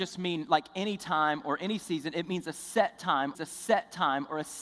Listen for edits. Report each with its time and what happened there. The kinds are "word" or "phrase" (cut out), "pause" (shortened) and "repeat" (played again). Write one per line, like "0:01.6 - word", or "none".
0:03.3 - repeat